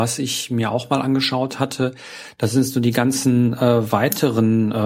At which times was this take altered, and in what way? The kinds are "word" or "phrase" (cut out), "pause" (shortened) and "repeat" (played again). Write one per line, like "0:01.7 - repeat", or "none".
none